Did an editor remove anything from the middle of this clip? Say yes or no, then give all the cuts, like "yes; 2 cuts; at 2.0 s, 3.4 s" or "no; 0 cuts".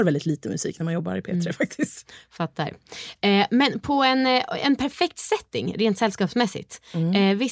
no; 0 cuts